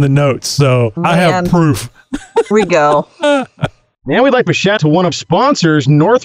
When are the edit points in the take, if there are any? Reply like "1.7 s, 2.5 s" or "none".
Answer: 1.0 s, 2.5 s, 4.5 s, 4.8 s, 5.1 s